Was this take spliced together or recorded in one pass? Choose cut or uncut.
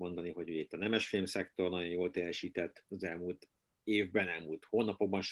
uncut